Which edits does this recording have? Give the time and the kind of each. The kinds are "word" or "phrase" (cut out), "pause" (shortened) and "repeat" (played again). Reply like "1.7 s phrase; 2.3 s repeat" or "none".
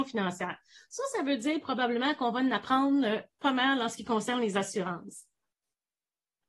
none